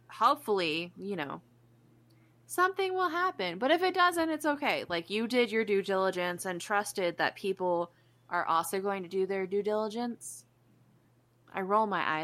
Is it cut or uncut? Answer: uncut